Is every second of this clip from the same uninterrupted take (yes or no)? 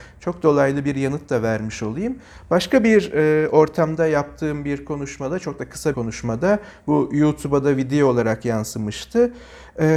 no